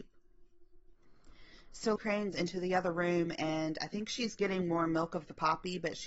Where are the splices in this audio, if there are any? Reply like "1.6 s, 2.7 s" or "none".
2.0 s, 2.3 s